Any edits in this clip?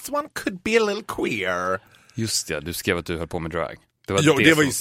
no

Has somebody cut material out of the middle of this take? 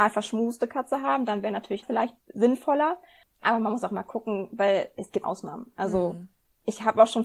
yes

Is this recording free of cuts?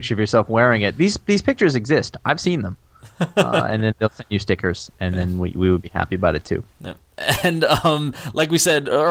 yes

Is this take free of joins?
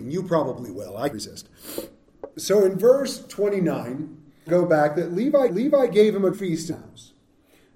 no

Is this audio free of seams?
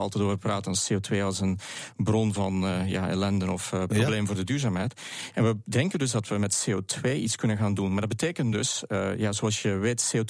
yes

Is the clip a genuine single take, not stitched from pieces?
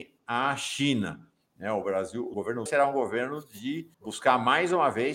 no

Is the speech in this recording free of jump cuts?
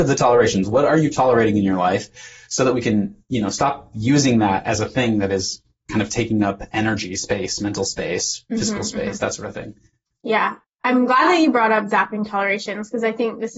yes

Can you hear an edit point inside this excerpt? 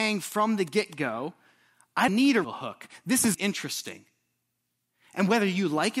yes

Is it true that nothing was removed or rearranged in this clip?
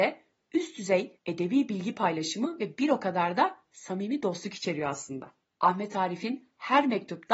no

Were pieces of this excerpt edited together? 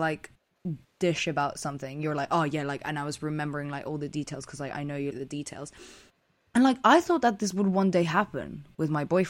yes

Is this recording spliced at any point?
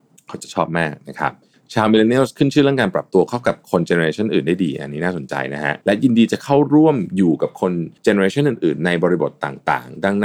yes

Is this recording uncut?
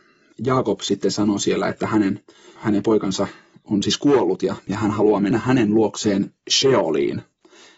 yes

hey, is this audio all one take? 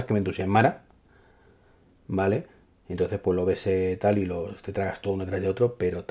yes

